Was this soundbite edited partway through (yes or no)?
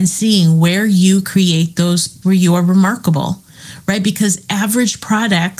yes